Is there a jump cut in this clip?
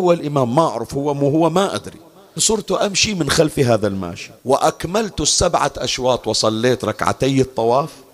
yes; 2 cuts; at 2.4 s, 4.4 s

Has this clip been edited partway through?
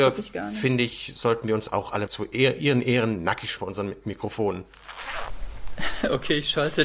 yes; 2 cuts; at 2.1 s, 3.6 s

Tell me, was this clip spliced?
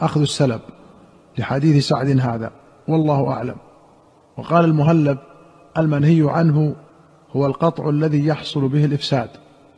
no; 0 cuts

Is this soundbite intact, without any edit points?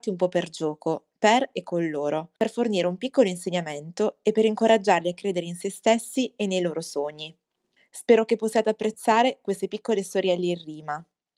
no; 2 cuts; at 2.4 s, 7.8 s

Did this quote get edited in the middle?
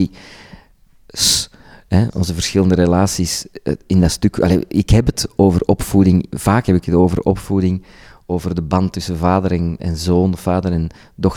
no; 0 cuts

